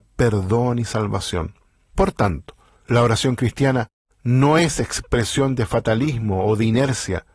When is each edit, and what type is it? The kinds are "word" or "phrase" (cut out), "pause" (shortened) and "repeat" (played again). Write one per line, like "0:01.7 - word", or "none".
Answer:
none